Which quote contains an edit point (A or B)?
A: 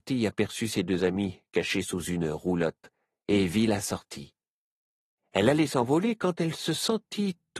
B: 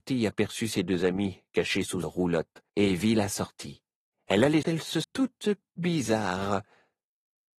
B